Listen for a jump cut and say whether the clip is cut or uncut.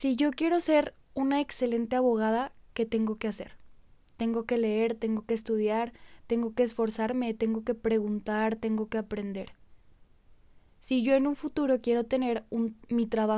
uncut